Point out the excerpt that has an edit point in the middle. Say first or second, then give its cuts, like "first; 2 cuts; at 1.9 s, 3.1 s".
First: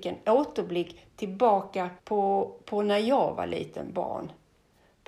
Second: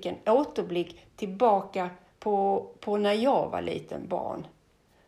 first; 1 cut; at 2.0 s